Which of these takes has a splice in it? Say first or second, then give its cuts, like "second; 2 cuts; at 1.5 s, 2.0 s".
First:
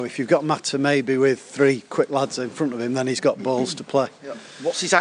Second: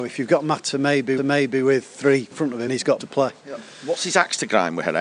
second; 4 cuts; at 1.2 s, 2.3 s, 2.7 s, 3.0 s